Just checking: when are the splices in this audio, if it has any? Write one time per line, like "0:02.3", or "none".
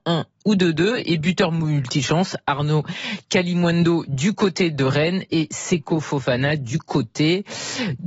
none